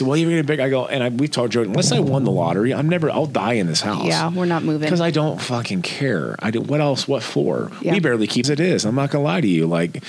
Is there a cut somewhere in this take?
yes; 1 cut; at 8.4 s

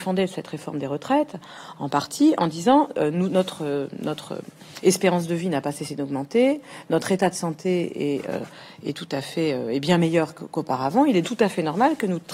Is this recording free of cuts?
no; 1 cut; at 11.2 s

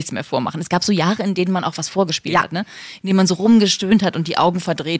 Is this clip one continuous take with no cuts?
yes; 0 cuts

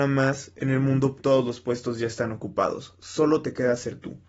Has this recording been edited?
yes; 1 cut; at 1.2 s

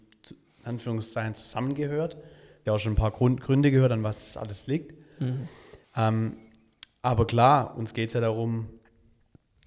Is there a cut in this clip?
yes; 2 cuts; at 2.7 s, 5.8 s

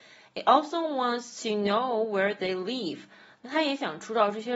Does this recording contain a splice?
no; 0 cuts

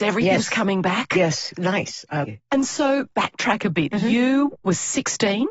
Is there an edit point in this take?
yes; 3 cuts; at 1.5 s, 2.2 s, 3.1 s

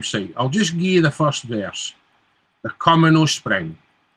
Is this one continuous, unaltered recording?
yes; 0 cuts

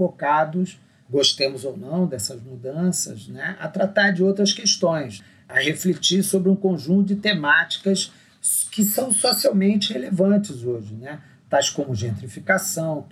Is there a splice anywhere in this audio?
no; 0 cuts

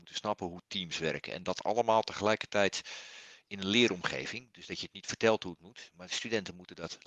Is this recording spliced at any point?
no; 0 cuts

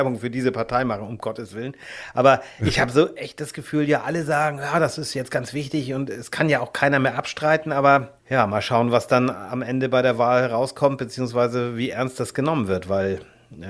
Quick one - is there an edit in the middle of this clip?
yes; 1 cut; at 8.2 s

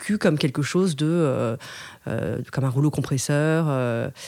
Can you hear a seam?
no; 0 cuts

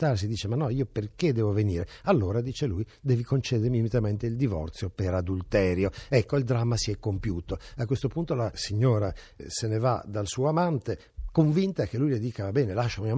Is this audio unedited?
yes; 0 cuts

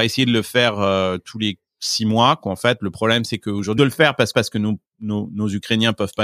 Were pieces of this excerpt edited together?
yes; 2 cuts; at 3.8 s, 4.3 s

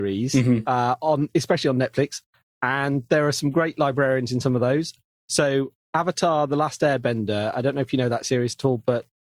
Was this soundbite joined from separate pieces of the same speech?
no; 0 cuts

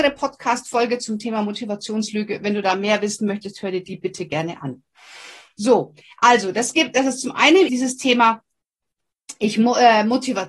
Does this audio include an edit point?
yes; 1 cut; at 7.7 s

